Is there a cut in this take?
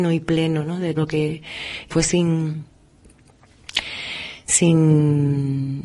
yes; 2 cuts; at 1.0 s, 1.9 s

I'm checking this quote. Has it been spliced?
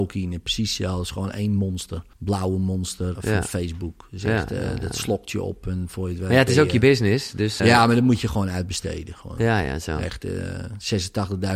yes; 3 cuts; at 2.1 s, 3.1 s, 7.6 s

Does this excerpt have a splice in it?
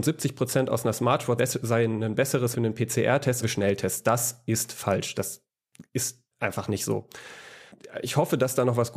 yes; 4 cuts; at 1.4 s, 2.5 s, 3.4 s, 6.3 s

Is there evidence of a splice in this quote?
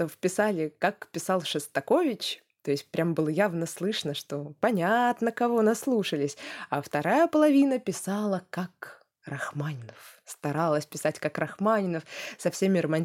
no; 0 cuts

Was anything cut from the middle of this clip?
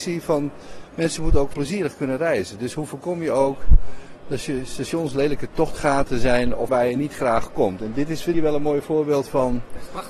yes; 3 cuts; at 1.5 s, 6.7 s, 8.3 s

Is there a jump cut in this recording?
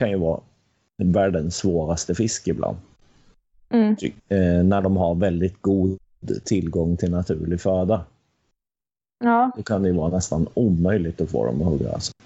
yes; 1 cut; at 4.2 s

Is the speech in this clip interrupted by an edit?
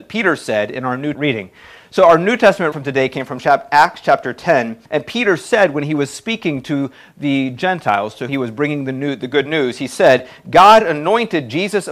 yes; 4 cuts; at 1.1 s, 2.7 s, 4.8 s, 8.3 s

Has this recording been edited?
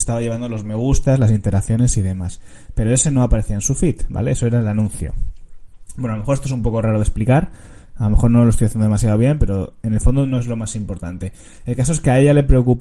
no; 0 cuts

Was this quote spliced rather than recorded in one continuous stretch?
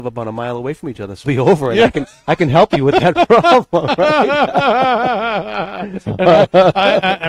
yes; 1 cut; at 1.2 s

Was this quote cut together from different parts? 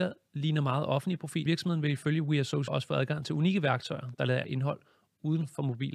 yes; 3 cuts; at 1.5 s, 2.7 s, 4.4 s

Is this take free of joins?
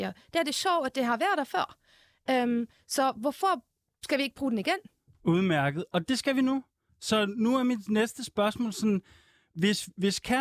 yes; 0 cuts

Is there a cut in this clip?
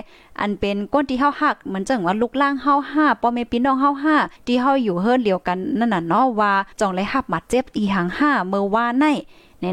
yes; 2 cuts; at 4.4 s, 6.7 s

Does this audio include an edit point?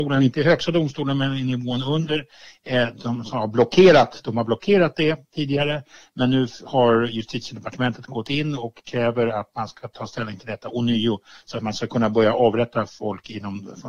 no; 0 cuts

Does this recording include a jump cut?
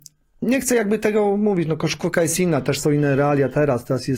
no; 0 cuts

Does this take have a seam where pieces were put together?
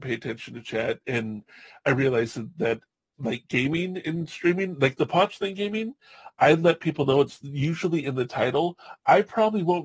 no; 0 cuts

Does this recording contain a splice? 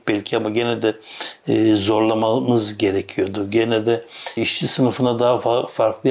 yes; 1 cut; at 4.4 s

